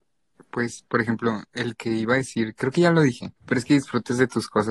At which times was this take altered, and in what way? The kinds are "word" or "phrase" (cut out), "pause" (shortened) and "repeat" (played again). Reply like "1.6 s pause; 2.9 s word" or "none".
1.5 s pause; 3.4 s pause

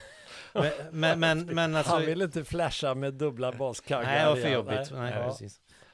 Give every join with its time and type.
none

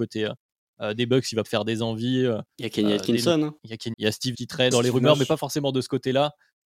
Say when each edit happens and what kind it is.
1.4 s word; 3.6 s pause; 3.9 s word; 4.3 s word; 4.7 s phrase

